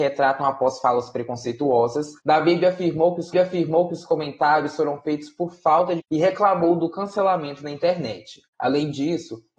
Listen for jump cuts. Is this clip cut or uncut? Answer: cut